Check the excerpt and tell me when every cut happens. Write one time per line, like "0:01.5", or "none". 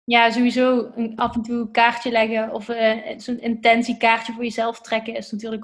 none